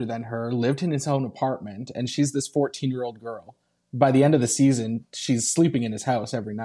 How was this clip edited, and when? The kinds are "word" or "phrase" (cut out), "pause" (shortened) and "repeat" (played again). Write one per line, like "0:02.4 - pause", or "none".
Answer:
none